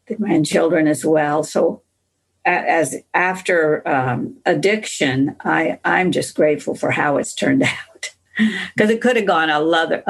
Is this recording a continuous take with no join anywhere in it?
yes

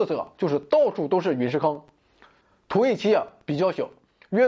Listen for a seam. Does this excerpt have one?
no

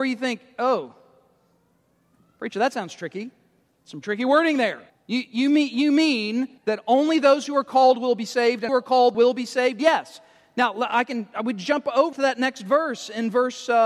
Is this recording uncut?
no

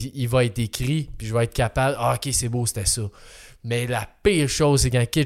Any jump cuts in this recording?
no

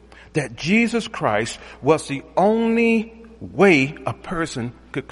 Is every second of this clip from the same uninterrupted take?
yes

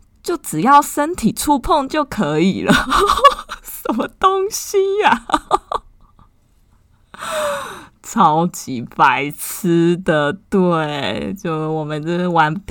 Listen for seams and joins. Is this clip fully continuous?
yes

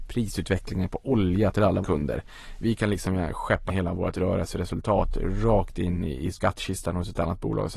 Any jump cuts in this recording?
yes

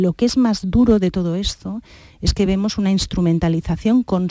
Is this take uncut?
yes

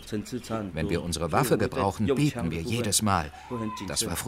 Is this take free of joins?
yes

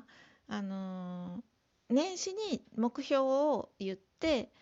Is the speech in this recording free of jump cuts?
yes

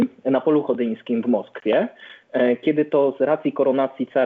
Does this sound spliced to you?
no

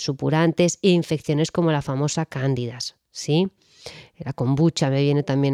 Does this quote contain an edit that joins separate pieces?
no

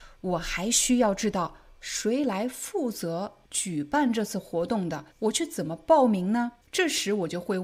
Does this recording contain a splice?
yes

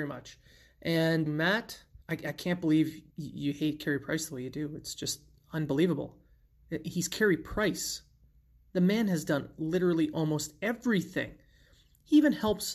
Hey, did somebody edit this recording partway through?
yes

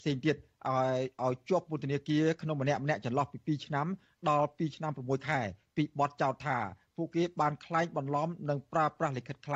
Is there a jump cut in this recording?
no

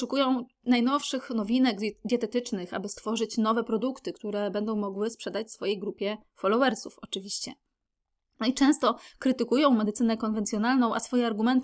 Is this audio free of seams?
yes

